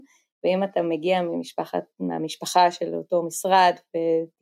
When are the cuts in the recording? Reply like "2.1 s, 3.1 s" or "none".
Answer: none